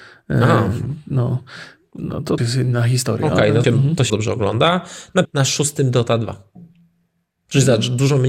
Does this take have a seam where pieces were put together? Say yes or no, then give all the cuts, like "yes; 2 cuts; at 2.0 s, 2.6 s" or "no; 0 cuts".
yes; 4 cuts; at 2.4 s, 3.6 s, 4.1 s, 5.2 s